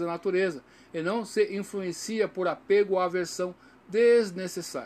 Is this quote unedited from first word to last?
yes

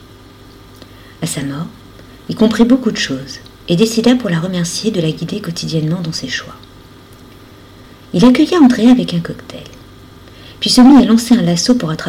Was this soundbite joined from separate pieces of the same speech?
no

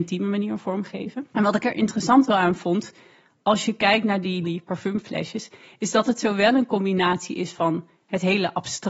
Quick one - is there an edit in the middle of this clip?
yes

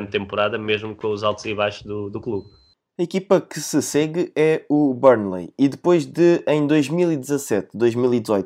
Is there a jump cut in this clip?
no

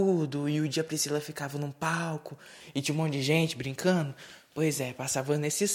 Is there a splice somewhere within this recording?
no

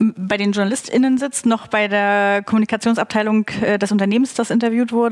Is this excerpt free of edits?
yes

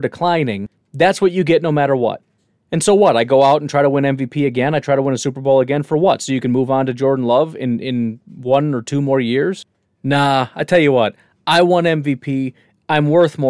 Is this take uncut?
yes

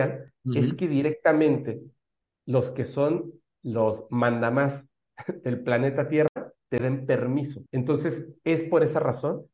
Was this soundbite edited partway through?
yes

